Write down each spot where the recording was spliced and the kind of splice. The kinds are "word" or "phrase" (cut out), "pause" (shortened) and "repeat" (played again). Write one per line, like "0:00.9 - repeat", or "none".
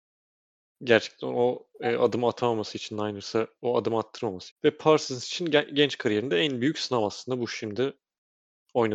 0:04.5 - word